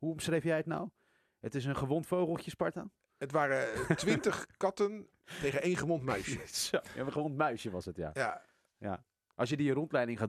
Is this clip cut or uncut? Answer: uncut